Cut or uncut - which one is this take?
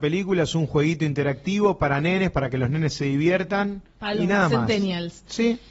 uncut